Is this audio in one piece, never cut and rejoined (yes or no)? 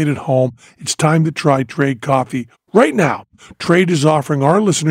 yes